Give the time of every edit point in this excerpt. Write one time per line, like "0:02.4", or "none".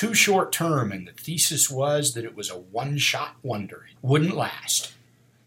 0:04.0